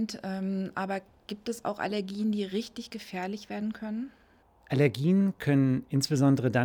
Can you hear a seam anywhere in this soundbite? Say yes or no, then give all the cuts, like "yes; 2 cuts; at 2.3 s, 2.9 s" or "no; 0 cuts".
no; 0 cuts